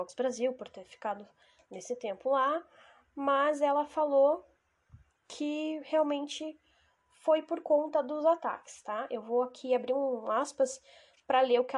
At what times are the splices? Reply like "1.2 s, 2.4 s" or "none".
none